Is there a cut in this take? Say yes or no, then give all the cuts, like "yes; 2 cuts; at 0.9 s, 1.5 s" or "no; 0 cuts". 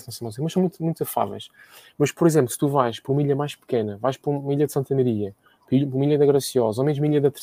no; 0 cuts